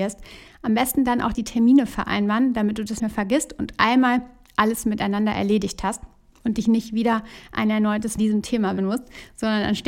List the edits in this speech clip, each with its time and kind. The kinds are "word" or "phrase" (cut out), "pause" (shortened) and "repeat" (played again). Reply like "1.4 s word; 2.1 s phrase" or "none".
1.3 s word; 3.0 s word; 8.2 s word; 8.8 s word